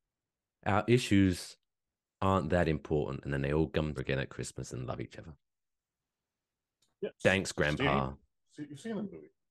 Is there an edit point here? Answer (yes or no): yes